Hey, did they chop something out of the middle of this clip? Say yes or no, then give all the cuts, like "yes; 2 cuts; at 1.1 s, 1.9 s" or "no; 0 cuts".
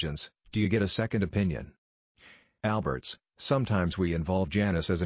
no; 0 cuts